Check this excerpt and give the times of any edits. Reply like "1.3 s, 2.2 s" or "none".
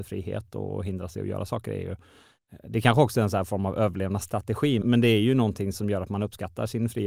4.8 s